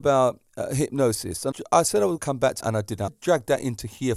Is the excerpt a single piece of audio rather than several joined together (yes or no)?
no